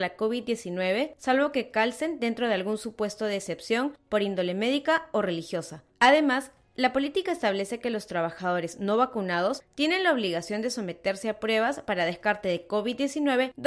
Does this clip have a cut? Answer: no; 0 cuts

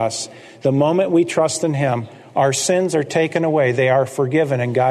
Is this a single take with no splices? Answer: yes; 0 cuts

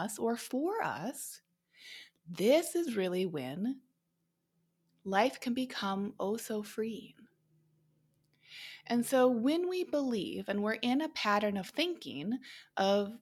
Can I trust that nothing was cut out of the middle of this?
yes; 0 cuts

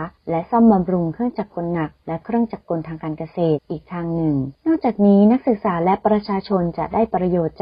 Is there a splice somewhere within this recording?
yes; 1 cut; at 2.0 s

